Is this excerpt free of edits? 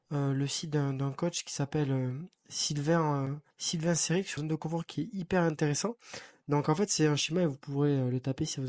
no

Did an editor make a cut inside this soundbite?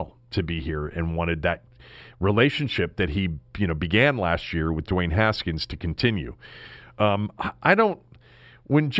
no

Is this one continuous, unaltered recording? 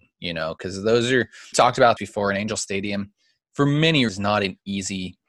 no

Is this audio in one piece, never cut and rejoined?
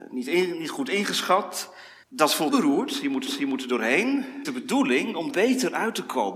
no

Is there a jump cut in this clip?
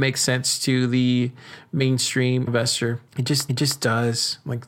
yes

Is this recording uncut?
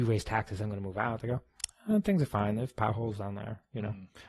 yes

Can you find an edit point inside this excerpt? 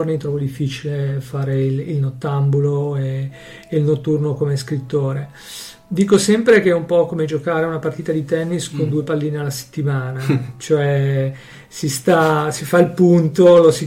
no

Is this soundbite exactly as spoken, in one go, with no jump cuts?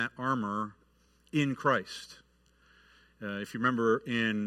yes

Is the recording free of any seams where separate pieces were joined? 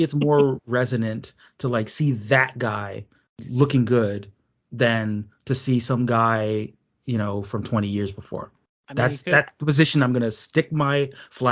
yes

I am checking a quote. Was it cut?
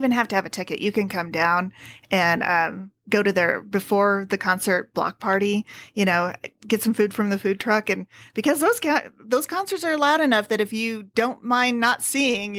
no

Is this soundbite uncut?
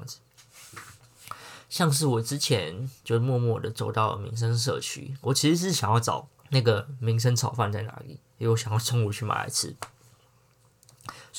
no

